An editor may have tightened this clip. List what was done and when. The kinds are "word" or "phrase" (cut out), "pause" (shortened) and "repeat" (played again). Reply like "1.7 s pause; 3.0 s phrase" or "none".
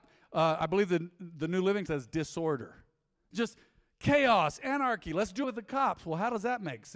1.9 s word; 5.4 s word